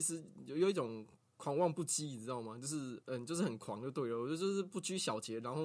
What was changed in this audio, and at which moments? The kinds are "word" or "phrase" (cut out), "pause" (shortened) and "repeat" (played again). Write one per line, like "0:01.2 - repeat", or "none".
none